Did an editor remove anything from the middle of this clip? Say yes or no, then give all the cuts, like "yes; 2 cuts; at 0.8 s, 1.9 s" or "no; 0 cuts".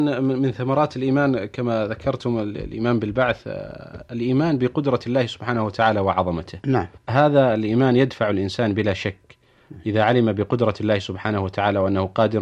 yes; 1 cut; at 7.0 s